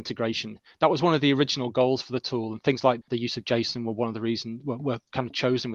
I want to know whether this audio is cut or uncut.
cut